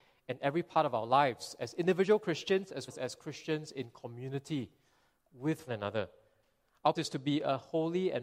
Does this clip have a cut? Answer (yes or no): yes